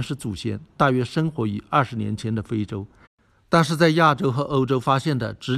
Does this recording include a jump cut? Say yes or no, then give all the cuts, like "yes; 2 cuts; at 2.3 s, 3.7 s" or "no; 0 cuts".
no; 0 cuts